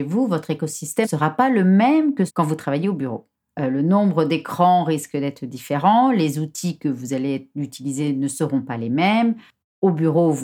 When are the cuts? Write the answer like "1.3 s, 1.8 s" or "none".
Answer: 1.0 s, 2.3 s